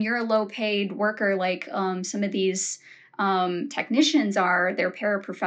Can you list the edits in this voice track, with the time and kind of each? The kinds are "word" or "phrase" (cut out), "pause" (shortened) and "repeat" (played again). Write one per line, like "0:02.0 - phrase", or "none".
none